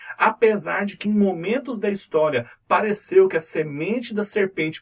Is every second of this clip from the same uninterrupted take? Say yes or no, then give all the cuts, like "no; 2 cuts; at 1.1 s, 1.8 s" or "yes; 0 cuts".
yes; 0 cuts